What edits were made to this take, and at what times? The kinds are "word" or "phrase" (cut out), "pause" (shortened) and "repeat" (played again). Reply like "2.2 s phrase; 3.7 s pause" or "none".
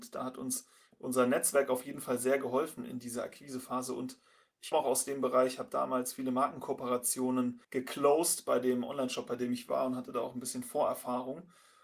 4.7 s word; 7.6 s pause